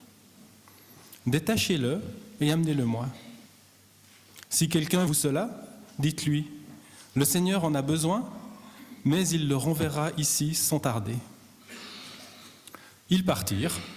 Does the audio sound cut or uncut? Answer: cut